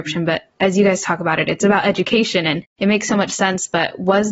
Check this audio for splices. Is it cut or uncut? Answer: uncut